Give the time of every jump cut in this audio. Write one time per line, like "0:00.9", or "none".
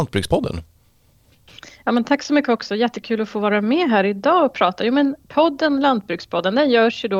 none